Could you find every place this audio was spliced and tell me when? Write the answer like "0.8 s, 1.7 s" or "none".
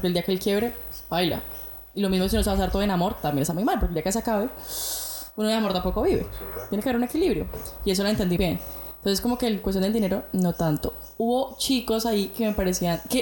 8.4 s